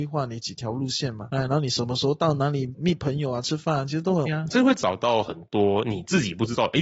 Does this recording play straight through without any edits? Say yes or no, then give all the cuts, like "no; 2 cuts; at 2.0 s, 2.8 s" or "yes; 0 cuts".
no; 1 cut; at 4.2 s